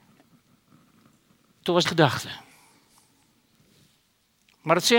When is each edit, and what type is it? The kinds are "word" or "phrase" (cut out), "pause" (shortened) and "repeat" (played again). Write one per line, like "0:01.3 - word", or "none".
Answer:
0:01.8 - phrase